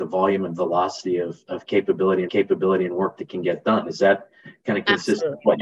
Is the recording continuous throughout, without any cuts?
no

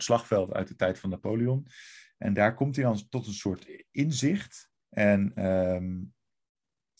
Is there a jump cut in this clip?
yes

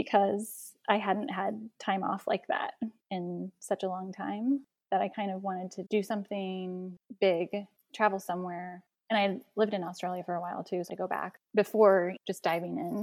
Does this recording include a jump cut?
yes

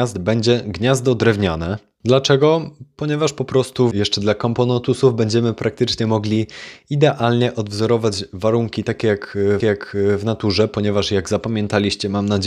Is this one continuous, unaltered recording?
no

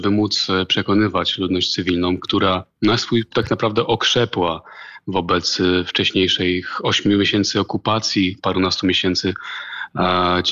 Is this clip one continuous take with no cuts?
no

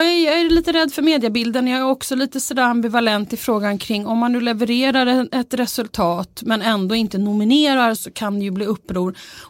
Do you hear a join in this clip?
yes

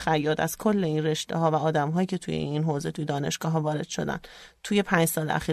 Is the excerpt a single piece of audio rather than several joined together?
yes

